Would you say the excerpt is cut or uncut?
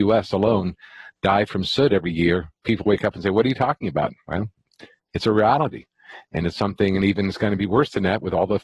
uncut